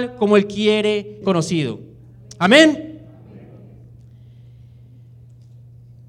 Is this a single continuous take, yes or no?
no